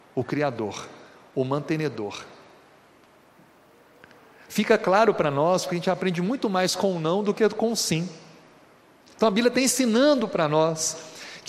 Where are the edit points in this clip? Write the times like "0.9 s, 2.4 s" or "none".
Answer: none